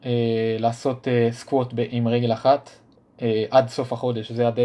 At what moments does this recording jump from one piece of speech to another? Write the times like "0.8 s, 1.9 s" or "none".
3.0 s